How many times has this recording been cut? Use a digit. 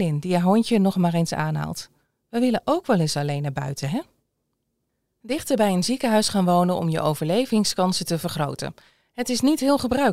0